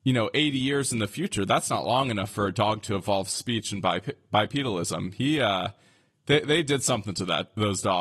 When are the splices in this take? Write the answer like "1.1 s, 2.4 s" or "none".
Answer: none